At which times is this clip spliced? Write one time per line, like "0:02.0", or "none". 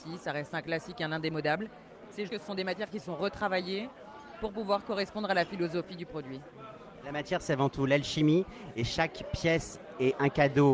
0:02.3